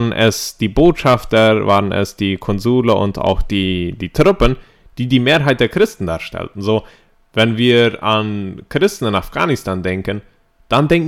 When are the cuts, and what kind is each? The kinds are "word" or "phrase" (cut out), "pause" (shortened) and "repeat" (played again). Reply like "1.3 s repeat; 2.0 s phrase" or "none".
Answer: none

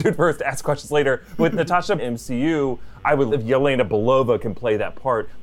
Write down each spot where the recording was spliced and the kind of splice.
2.0 s phrase; 3.3 s word

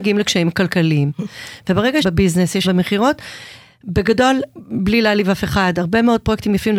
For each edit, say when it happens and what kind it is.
2.0 s phrase; 2.6 s word; 4.5 s phrase

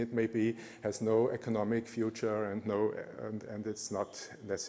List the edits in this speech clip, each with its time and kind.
none

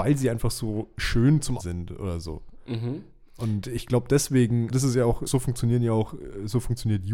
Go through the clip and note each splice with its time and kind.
1.6 s word; 4.7 s word; 5.3 s word

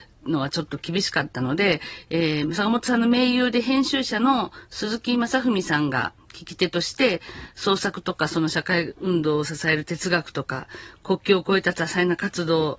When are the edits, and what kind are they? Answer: none

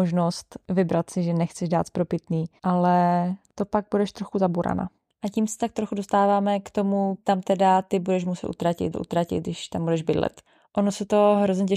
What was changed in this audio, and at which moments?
2.6 s pause; 7.2 s word; 8.9 s repeat

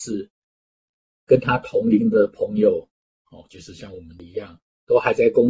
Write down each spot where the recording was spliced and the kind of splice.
none

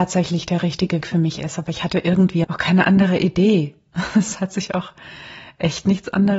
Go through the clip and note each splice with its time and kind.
1.0 s word; 2.4 s word

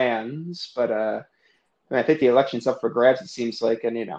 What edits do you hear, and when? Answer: none

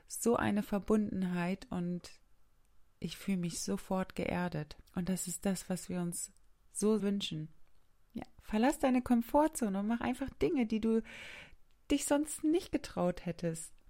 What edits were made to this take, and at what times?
4.9 s pause; 7.0 s word; 7.9 s pause

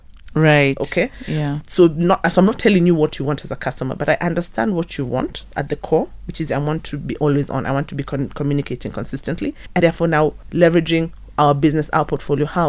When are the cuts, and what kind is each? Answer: 9.8 s word

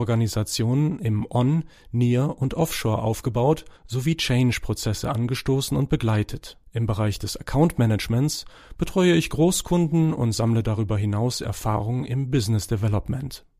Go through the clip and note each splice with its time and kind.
3.8 s pause; 6.6 s pause

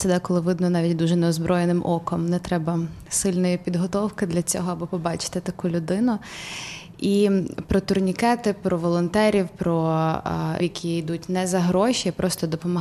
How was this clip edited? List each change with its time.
10.6 s word

